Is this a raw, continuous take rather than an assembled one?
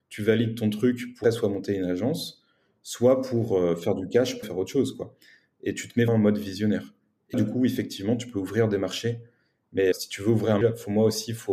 no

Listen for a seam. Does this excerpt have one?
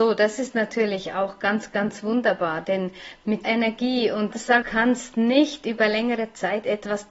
yes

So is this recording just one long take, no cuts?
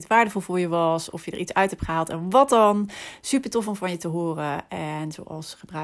yes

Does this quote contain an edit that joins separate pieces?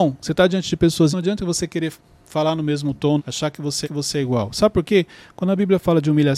yes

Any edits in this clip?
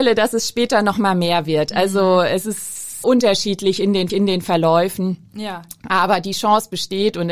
yes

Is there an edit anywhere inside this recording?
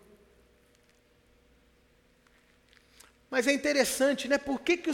no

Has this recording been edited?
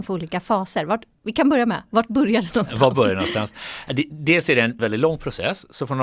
yes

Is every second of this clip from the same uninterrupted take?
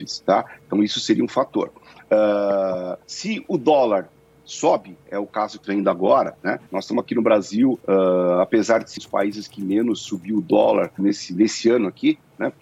no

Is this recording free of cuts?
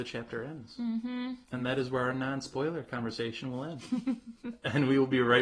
yes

